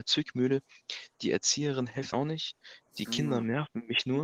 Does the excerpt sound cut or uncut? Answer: cut